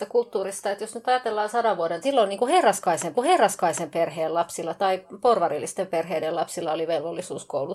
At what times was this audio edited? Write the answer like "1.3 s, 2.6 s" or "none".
2.0 s, 3.1 s